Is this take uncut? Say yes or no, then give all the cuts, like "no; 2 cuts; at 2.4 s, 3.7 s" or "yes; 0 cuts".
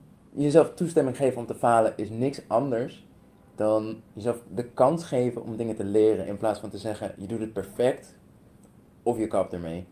no; 1 cut; at 4.1 s